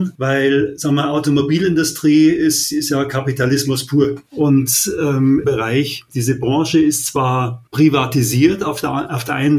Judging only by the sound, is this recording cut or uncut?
cut